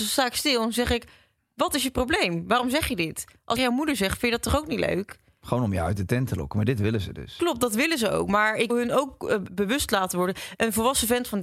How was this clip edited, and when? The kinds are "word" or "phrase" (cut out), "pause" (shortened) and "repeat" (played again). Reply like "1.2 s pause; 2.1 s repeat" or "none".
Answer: 3.6 s phrase; 8.7 s word; 9.5 s word